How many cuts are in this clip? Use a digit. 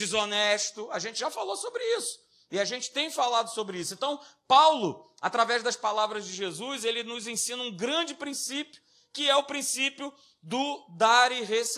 0